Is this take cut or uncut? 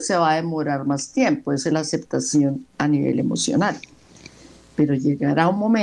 cut